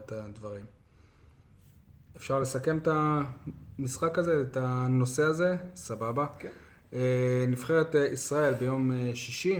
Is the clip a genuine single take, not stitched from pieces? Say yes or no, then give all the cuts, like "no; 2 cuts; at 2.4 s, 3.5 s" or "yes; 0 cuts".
yes; 0 cuts